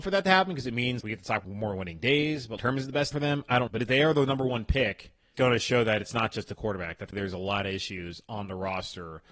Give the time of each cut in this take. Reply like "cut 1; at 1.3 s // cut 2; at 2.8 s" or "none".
cut 1; at 1.0 s // cut 2; at 1.4 s // cut 3; at 2.6 s // cut 4; at 3.1 s // cut 5; at 3.7 s // cut 6; at 5.3 s // cut 7; at 7.1 s